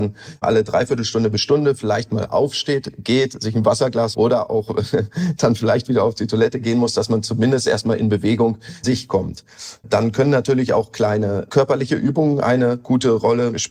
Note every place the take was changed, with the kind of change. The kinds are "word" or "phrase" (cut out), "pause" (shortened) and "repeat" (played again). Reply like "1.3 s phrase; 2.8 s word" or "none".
4.1 s word; 8.8 s word